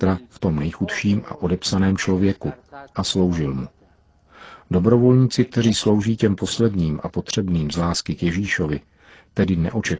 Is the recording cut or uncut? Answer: uncut